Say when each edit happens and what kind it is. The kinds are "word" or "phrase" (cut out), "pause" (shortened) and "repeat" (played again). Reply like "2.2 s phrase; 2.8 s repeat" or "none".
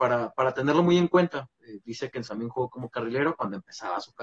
2.3 s phrase